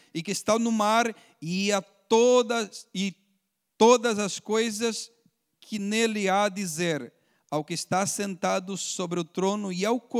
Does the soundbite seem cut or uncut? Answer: uncut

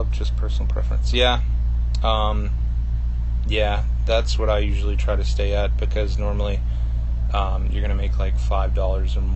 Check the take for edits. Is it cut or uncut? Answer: uncut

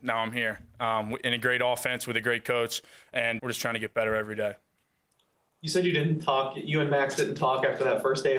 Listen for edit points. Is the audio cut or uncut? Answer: cut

